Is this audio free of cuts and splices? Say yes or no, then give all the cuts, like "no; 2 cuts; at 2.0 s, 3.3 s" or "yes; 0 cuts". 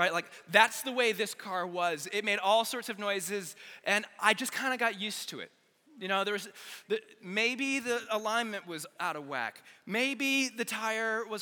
yes; 0 cuts